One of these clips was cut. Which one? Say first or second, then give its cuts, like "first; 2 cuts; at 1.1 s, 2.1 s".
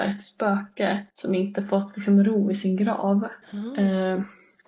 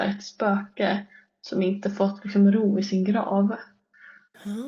first; 2 cuts; at 1.1 s, 3.4 s